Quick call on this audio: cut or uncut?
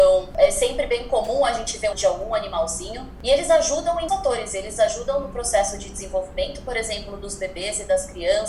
cut